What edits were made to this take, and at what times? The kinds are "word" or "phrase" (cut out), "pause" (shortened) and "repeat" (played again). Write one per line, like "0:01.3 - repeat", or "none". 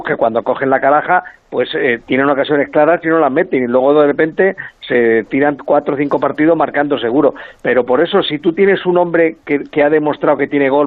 none